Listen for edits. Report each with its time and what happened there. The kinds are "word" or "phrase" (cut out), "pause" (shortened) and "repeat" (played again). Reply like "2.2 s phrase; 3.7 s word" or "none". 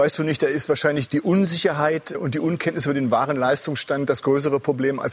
1.1 s word; 2.1 s word